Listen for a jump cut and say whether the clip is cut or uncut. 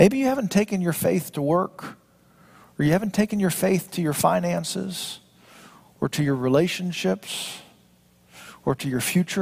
uncut